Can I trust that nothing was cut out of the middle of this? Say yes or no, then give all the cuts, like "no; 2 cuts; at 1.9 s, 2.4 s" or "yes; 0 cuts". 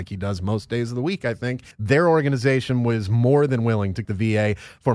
no; 2 cuts; at 1.7 s, 4.0 s